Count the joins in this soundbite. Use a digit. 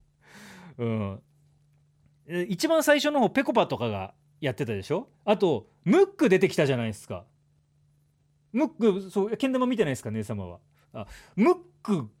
1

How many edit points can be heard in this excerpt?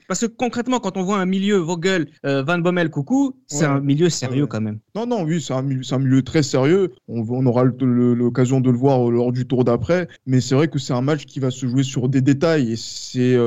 4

